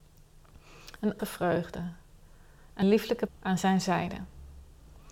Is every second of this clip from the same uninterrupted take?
no; 3 cuts; at 1.2 s, 2.8 s, 3.3 s

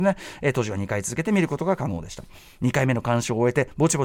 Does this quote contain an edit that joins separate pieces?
no; 0 cuts

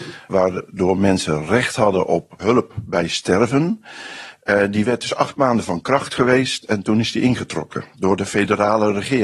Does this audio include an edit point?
no; 0 cuts

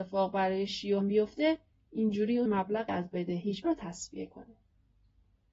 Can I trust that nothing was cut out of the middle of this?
no; 4 cuts; at 1.0 s, 2.5 s, 2.9 s, 3.6 s

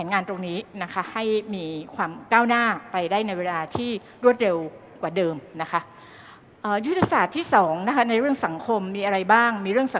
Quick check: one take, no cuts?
yes; 0 cuts

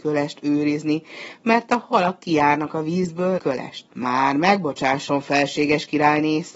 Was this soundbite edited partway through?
yes; 2 cuts; at 3.4 s, 3.9 s

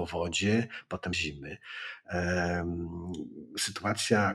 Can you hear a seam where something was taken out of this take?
yes; 1 cut; at 1.1 s

